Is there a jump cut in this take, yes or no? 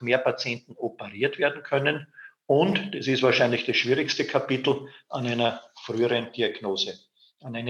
no